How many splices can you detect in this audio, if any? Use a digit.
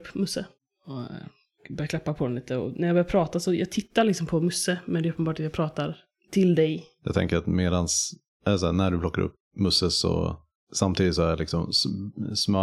0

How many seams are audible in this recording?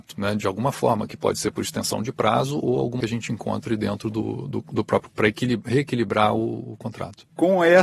2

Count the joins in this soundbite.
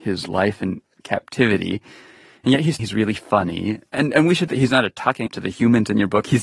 3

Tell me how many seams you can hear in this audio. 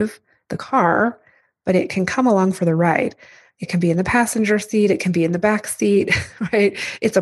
0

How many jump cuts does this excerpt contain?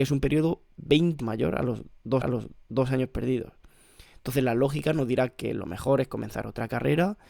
2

